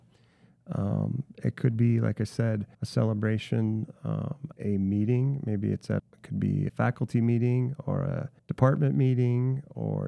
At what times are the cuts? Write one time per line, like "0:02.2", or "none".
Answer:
0:02.7
0:04.5
0:06.0
0:06.7
0:08.4